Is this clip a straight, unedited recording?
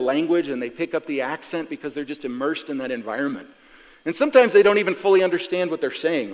yes; 0 cuts

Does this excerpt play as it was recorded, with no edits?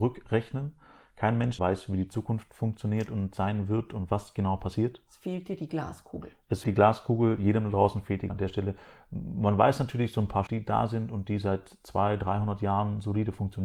no; 4 cuts; at 1.6 s, 6.6 s, 8.3 s, 10.5 s

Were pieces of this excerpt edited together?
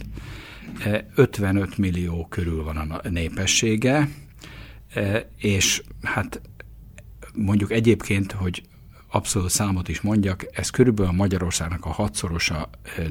no; 0 cuts

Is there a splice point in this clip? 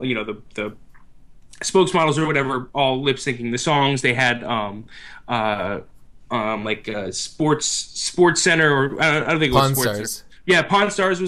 no; 0 cuts

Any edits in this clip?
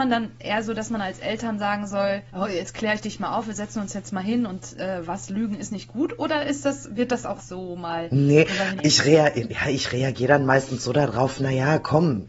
yes; 3 cuts; at 2.3 s, 7.4 s, 8.8 s

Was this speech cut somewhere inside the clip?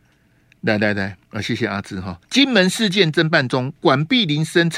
yes; 2 cuts; at 1.2 s, 2.2 s

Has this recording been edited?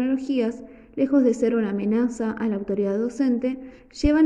no; 0 cuts

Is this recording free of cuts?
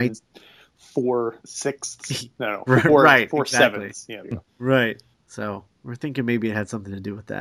no; 3 cuts; at 1.4 s, 4.2 s, 5.1 s

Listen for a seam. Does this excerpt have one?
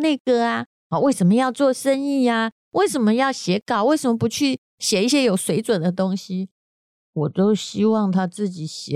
no; 0 cuts

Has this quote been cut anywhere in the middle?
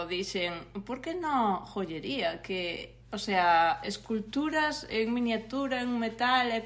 yes; 1 cut; at 3.0 s

